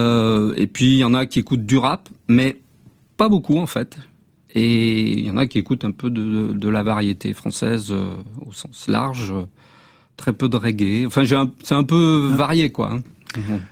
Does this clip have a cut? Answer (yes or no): no